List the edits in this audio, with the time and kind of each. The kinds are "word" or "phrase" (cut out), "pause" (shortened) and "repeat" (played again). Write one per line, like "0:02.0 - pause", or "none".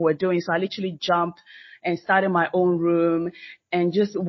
none